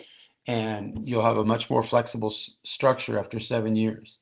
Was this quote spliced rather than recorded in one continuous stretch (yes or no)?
no